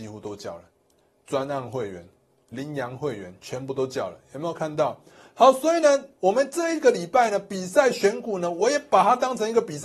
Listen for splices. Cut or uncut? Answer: uncut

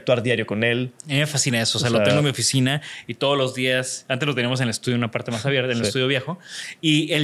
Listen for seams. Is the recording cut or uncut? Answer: uncut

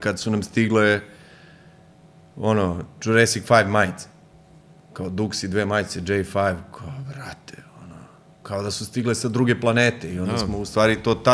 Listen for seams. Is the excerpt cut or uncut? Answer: uncut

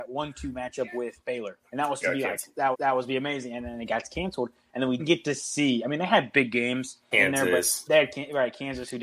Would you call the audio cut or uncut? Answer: cut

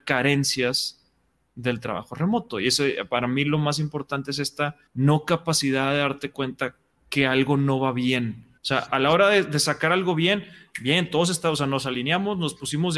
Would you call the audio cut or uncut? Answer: cut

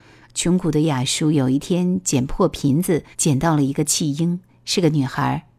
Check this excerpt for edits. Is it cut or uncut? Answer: cut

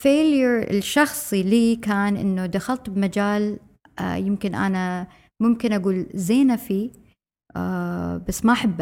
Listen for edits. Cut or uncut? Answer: uncut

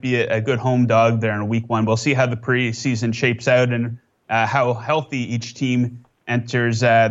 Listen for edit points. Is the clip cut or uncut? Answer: uncut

